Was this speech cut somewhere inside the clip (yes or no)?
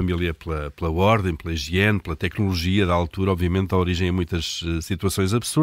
no